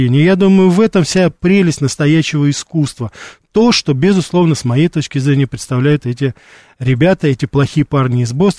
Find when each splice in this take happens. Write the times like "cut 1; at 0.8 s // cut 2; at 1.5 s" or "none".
none